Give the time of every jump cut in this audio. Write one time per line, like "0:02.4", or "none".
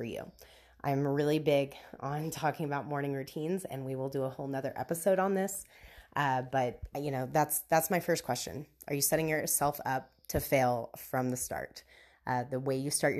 none